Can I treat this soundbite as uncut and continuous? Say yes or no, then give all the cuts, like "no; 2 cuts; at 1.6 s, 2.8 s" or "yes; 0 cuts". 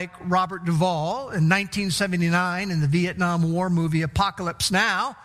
yes; 0 cuts